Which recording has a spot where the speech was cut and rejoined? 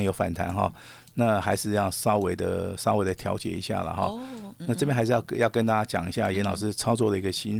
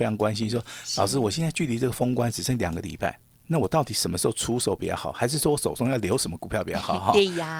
second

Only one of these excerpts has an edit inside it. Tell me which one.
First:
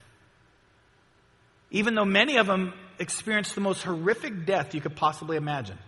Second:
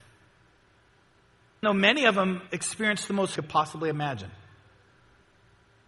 second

